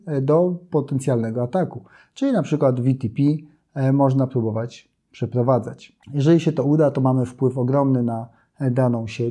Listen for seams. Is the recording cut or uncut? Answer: cut